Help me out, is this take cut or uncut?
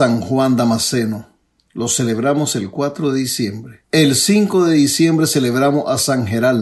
cut